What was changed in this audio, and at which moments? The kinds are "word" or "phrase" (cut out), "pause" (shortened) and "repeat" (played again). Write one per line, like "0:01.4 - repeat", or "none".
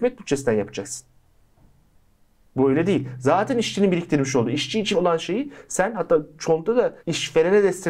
0:04.9 - word
0:07.0 - pause